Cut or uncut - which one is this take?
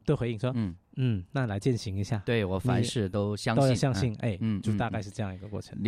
uncut